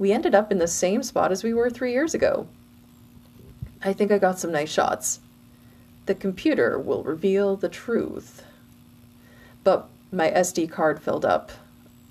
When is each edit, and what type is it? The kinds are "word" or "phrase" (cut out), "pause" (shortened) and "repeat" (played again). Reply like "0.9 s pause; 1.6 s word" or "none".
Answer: 3.7 s pause

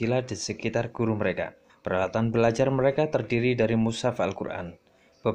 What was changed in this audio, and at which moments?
1.7 s pause

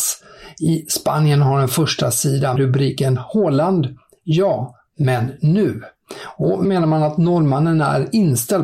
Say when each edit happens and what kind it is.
2.6 s phrase; 6.6 s word

